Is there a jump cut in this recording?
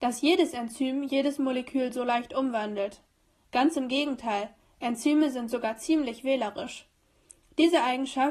no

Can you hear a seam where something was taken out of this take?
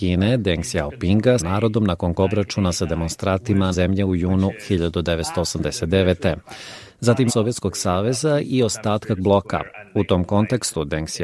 yes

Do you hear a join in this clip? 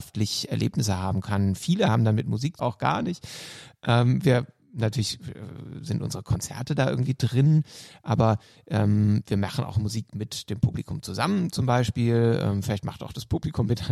yes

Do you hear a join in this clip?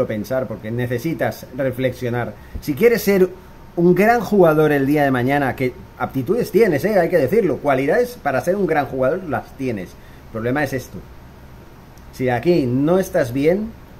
no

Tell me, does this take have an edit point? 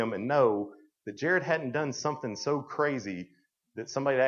no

